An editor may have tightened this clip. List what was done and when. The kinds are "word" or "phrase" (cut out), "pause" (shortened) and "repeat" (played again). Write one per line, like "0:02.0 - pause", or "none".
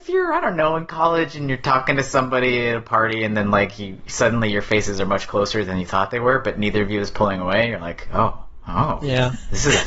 none